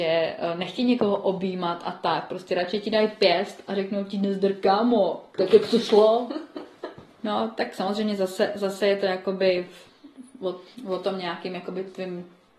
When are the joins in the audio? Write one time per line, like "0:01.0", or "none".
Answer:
none